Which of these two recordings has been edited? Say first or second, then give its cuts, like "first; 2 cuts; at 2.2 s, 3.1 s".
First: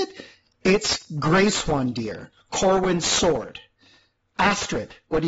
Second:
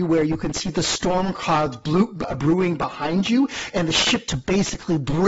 second; 1 cut; at 4.3 s